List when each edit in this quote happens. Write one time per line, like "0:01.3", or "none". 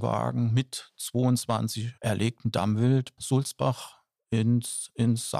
0:02.0
0:03.2